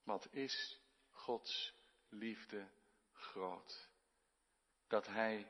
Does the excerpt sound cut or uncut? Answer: uncut